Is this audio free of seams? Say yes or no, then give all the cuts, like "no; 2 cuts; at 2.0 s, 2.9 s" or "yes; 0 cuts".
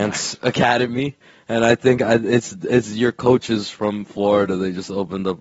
yes; 0 cuts